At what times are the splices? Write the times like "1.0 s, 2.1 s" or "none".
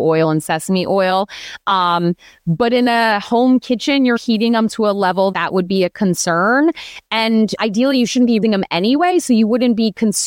4.2 s, 5.3 s, 7.6 s, 8.4 s